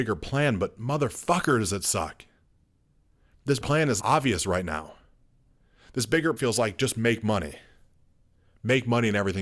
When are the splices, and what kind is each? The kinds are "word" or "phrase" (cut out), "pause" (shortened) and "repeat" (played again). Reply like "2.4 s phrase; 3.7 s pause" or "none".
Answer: 3.6 s word; 4.0 s word; 6.4 s word

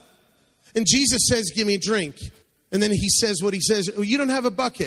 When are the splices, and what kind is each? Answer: 2.4 s pause

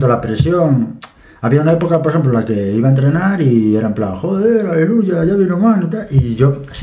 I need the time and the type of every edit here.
none

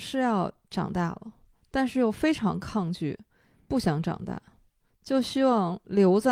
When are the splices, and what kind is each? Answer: none

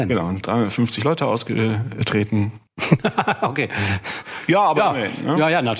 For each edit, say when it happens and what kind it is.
2.7 s pause

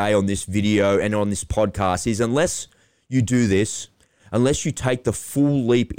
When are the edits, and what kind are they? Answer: none

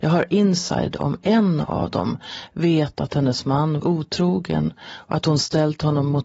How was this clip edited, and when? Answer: 3.8 s word

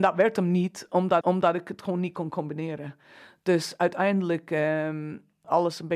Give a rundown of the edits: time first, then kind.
1.2 s repeat

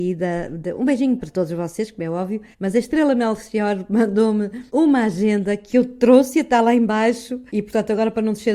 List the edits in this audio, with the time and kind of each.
1.2 s word; 2.5 s pause; 4.7 s pause; 7.5 s pause

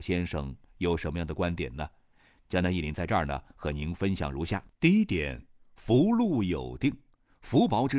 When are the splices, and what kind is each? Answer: 4.7 s pause

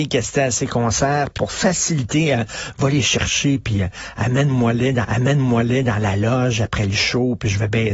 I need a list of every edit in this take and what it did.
1.4 s word; 5.0 s repeat

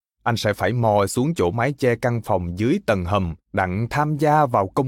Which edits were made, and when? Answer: 3.4 s pause

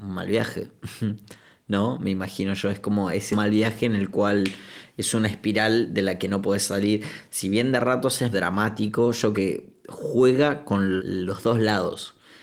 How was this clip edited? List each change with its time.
3.3 s word; 8.3 s word; 9.3 s word; 11.0 s word

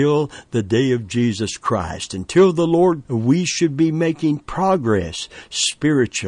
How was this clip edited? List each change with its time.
3.0 s word

